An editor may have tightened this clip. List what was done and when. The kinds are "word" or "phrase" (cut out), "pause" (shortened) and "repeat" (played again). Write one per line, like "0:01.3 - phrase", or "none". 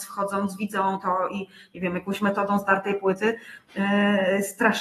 none